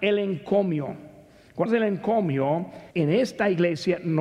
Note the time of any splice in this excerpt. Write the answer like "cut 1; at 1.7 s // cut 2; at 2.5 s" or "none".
cut 1; at 1.7 s // cut 2; at 2.9 s